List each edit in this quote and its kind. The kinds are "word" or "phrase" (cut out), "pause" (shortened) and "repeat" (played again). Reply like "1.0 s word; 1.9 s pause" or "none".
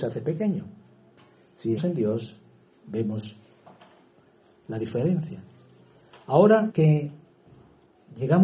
1.8 s word; 2.7 s pause; 6.7 s word